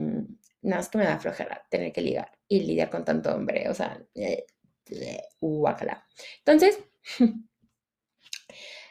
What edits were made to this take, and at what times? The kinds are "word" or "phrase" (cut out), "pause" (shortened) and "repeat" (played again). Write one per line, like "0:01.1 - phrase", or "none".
none